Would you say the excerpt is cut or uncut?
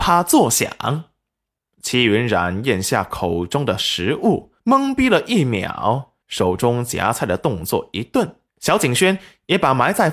cut